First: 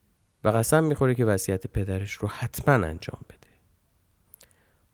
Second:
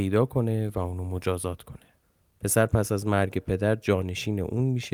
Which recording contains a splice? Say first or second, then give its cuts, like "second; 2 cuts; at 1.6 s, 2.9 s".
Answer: second; 1 cut; at 2.0 s